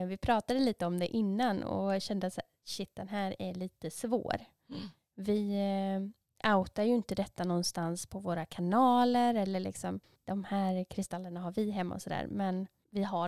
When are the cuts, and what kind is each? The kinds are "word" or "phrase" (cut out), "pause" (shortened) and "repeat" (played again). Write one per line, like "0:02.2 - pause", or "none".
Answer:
none